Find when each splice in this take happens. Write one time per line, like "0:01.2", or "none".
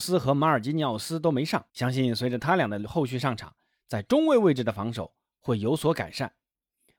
0:01.7

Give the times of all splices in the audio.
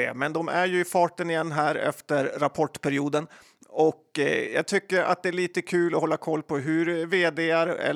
none

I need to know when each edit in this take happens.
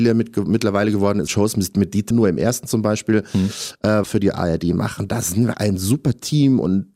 0:01.3
0:02.1
0:04.0
0:05.5

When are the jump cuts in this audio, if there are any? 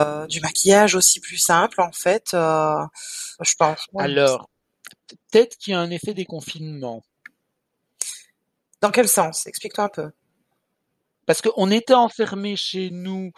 0:03.4

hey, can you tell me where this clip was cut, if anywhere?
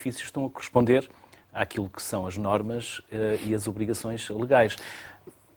none

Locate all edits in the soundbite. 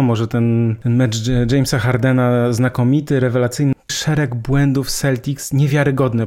0:03.9

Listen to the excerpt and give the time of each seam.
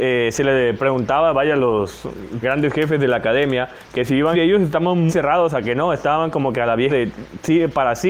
0:02.4
0:04.3
0:05.1
0:06.9

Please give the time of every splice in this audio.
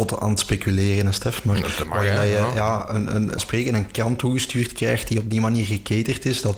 0:03.4

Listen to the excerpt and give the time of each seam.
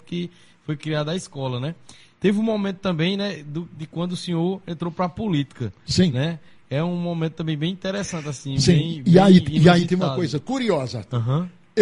none

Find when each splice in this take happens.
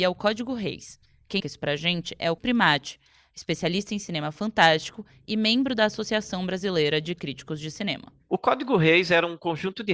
0:01.4
0:02.4

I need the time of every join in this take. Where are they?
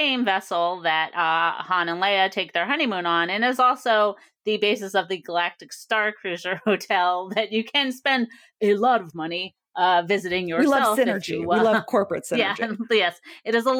none

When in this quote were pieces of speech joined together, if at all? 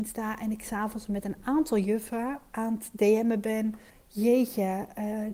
0:03.9

